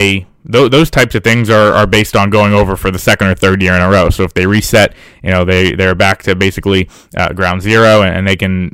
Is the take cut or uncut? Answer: uncut